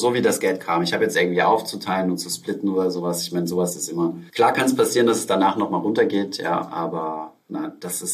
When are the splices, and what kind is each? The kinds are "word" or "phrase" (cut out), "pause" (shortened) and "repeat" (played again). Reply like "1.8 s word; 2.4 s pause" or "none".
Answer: 1.1 s phrase; 4.3 s pause